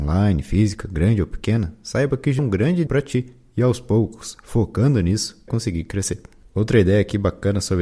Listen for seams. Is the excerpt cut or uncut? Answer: cut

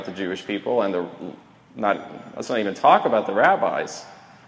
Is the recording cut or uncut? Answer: uncut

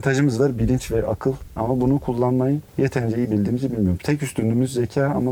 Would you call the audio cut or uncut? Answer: uncut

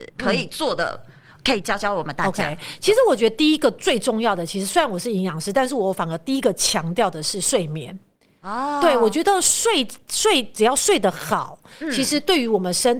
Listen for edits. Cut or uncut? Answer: uncut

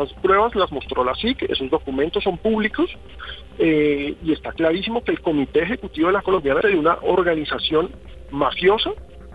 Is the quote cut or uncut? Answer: cut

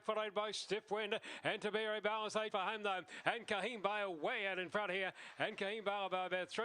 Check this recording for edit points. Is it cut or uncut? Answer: cut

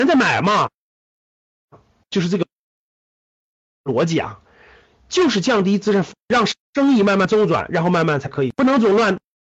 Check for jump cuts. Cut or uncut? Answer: cut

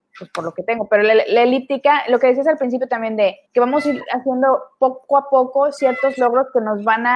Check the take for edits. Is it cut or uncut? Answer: cut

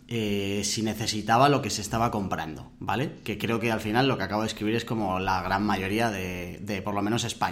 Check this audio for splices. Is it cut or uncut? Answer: uncut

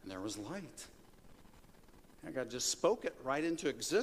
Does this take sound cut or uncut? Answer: uncut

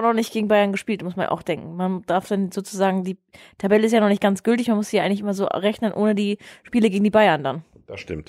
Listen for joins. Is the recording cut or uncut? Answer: uncut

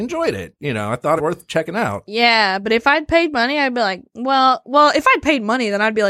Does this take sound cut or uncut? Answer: cut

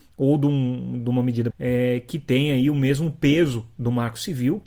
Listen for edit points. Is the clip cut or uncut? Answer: cut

